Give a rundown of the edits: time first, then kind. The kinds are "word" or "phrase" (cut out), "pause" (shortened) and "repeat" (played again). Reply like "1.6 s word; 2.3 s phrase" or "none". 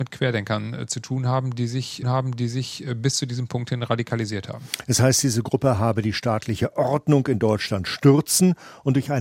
2.0 s repeat